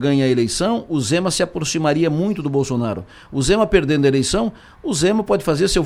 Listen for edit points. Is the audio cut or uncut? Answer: uncut